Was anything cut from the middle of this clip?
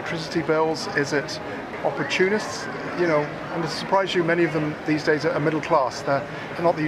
no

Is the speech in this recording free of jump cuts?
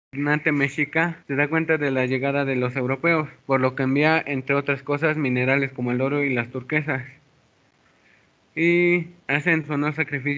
no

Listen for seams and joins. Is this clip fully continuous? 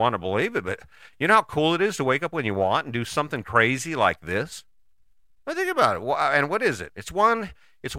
yes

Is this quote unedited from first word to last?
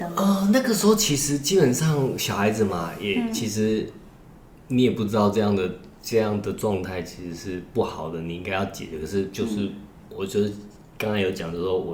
yes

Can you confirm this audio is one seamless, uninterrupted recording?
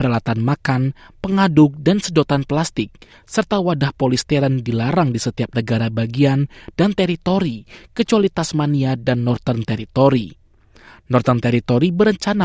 yes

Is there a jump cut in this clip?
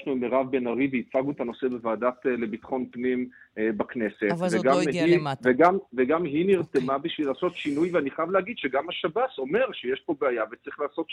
no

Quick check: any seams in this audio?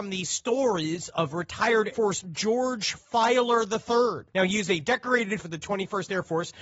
yes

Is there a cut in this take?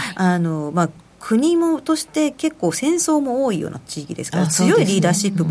no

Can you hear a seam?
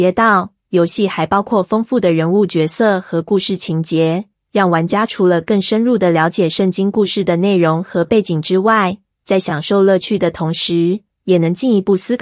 no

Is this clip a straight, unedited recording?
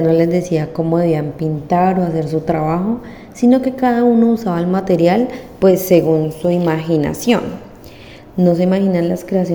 yes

